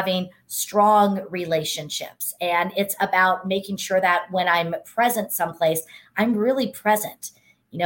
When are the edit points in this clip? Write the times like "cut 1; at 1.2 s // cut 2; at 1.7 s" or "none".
none